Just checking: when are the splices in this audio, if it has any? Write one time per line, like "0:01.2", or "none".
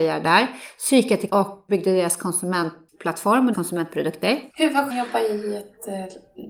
0:01.3
0:01.7
0:03.5
0:04.5
0:04.9